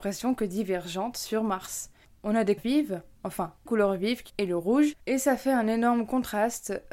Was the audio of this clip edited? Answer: yes; 6 cuts; at 1.3 s, 2.0 s, 2.6 s, 3.7 s, 4.3 s, 5.0 s

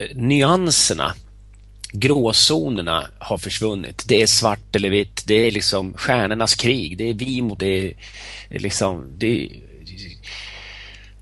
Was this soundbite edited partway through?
yes; 1 cut; at 7.6 s

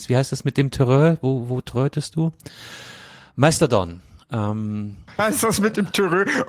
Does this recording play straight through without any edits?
no; 1 cut; at 5.2 s

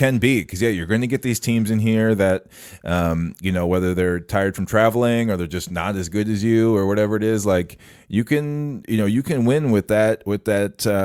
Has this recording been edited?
no; 0 cuts

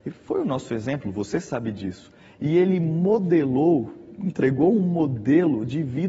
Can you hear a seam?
no; 0 cuts

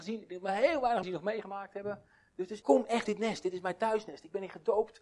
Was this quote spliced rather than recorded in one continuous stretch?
yes; 3 cuts; at 1.0 s, 2.6 s, 3.0 s

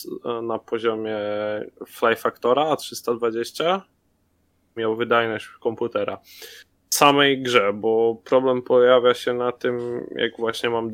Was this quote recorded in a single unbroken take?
no; 2 cuts; at 4.8 s, 6.7 s

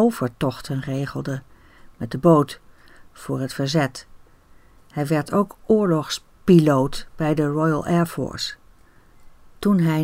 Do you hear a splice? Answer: no; 0 cuts

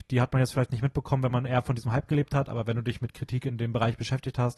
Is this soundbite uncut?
yes; 0 cuts

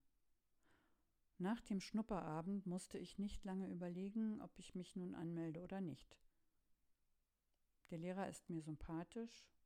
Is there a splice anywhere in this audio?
no; 0 cuts

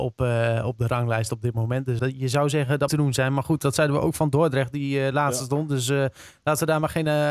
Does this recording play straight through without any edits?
no; 2 cuts; at 2.0 s, 2.9 s

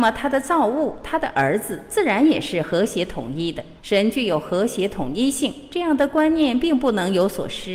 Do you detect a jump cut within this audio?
yes; 1 cut; at 3.8 s

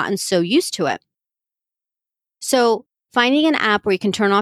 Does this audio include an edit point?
no; 0 cuts

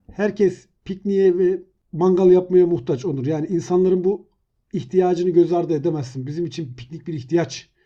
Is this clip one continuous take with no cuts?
yes; 0 cuts

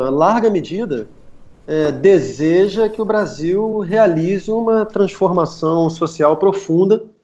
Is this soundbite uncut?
yes; 0 cuts

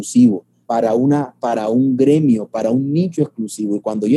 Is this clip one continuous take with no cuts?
yes; 0 cuts

